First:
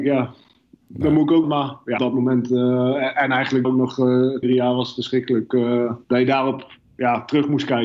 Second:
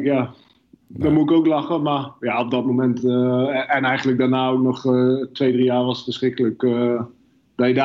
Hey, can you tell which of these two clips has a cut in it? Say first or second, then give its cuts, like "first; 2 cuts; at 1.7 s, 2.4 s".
first; 5 cuts; at 1.4 s, 2.0 s, 3.6 s, 4.4 s, 6.0 s